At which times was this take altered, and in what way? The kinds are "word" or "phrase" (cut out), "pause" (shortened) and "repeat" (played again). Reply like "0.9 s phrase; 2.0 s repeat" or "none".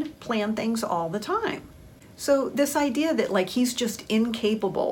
none